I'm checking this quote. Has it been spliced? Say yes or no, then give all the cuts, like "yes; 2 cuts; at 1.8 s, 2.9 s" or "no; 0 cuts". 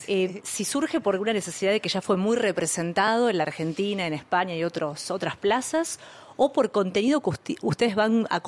no; 0 cuts